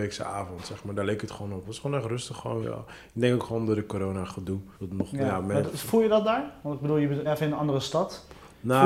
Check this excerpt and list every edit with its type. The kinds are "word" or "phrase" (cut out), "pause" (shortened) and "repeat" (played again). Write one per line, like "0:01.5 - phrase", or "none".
0:02.6 - word
0:04.7 - pause
0:07.3 - word